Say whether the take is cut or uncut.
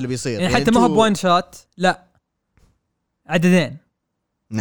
uncut